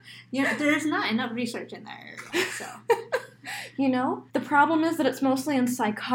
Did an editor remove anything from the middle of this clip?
yes; 1 cut; at 4.3 s

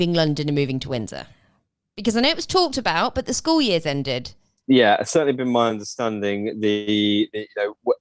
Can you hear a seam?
no; 0 cuts

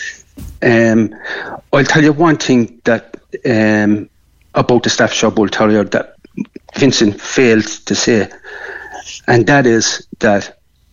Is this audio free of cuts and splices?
yes; 0 cuts

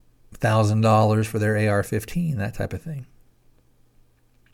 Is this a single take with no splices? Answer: yes; 0 cuts

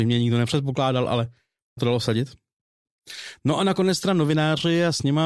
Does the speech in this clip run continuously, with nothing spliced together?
no; 1 cut; at 1.8 s

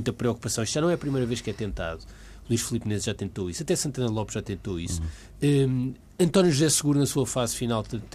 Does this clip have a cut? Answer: no; 0 cuts

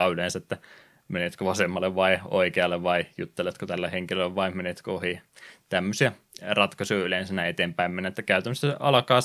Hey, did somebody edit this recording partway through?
no; 0 cuts

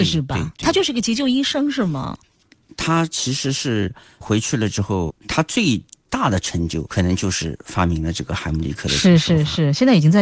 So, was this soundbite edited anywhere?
yes; 3 cuts; at 4.2 s, 5.1 s, 6.9 s

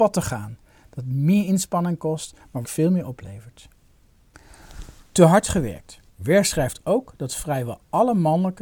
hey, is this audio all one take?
no; 2 cuts; at 2.6 s, 6.1 s

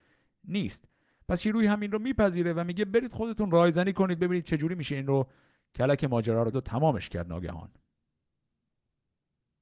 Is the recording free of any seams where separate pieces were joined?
no; 1 cut; at 6.5 s

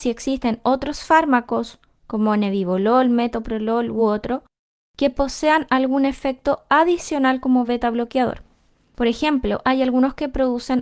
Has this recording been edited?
no; 0 cuts

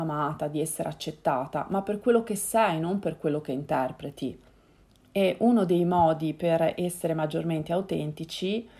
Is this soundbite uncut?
no; 1 cut; at 4.8 s

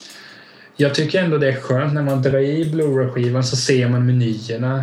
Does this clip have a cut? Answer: no; 0 cuts

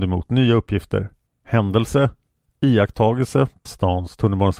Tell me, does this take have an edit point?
yes; 2 cuts; at 1.3 s, 3.7 s

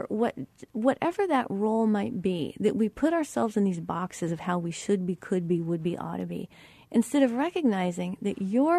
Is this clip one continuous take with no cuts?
yes; 0 cuts

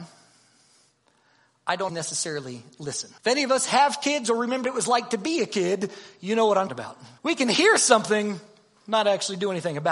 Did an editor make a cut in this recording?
yes; 5 cuts; at 1.9 s, 3.2 s, 4.6 s, 6.7 s, 7.2 s

